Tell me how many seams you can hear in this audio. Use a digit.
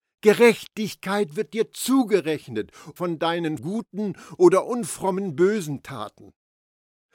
2